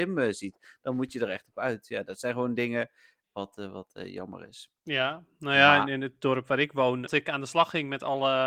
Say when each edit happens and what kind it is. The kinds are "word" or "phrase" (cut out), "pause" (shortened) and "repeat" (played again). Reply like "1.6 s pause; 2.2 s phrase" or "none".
3.2 s word; 7.1 s phrase